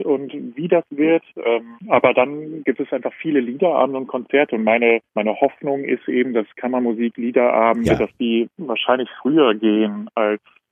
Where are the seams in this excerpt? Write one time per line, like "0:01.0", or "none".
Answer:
0:01.8
0:05.1